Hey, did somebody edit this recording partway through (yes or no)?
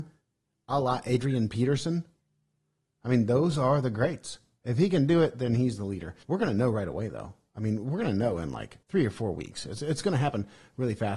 yes